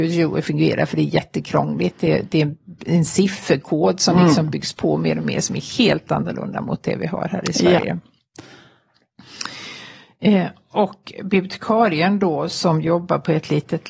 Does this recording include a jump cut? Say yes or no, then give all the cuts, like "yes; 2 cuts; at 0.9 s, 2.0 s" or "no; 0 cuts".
no; 0 cuts